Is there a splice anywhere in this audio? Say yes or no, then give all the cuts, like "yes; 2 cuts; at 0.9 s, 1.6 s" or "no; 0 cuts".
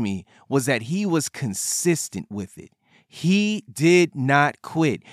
no; 0 cuts